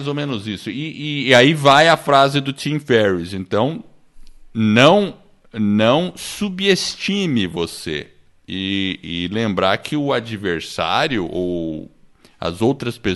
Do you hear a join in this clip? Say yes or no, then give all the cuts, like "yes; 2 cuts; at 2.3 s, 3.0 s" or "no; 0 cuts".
no; 0 cuts